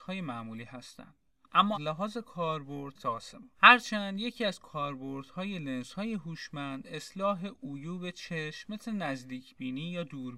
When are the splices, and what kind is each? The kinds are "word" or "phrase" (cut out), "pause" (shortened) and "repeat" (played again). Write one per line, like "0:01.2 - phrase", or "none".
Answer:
0:01.7 - word
0:03.0 - phrase
0:03.5 - pause